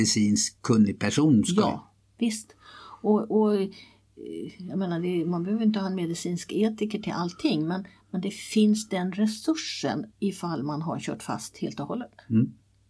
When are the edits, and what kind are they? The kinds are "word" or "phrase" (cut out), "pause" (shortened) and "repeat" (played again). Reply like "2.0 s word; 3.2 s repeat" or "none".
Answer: 10.1 s pause

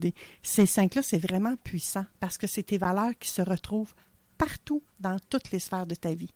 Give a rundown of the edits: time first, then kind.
2.1 s pause; 4.9 s phrase

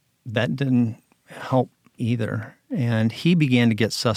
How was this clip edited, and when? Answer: 2.0 s phrase

